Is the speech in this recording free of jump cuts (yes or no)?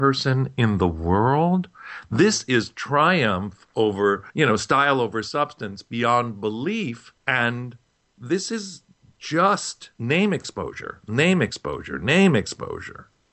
no